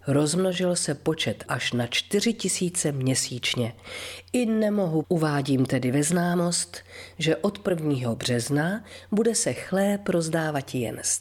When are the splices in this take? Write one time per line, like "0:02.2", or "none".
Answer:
0:01.5
0:05.0